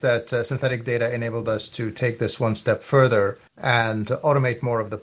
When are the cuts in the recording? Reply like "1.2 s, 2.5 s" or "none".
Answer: 3.5 s